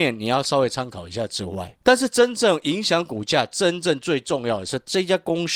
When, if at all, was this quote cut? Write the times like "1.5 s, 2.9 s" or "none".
1.8 s

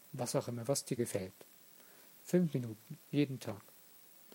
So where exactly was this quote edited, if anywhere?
1.0 s, 3.0 s

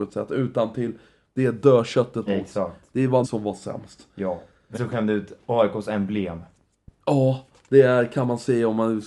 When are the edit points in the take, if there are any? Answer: 2.3 s, 3.2 s, 4.7 s

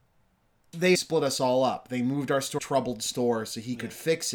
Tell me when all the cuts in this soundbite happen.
0.9 s, 2.6 s

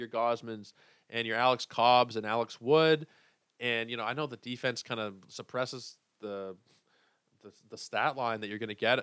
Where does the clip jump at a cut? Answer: none

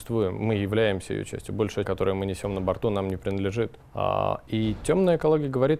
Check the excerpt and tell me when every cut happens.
1.8 s, 3.8 s

